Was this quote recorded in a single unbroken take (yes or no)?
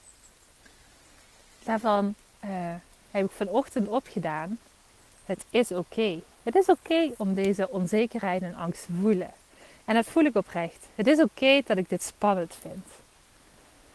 yes